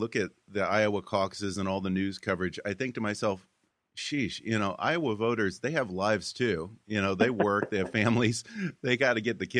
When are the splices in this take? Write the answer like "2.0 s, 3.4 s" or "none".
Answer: none